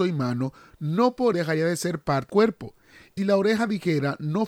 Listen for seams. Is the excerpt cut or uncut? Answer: cut